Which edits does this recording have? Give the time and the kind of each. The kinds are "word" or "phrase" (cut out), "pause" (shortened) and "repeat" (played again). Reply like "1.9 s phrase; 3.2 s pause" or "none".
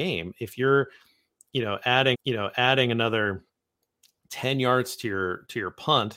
2.1 s repeat